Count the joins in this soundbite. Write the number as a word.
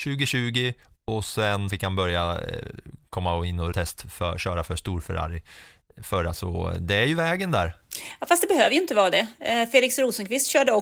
three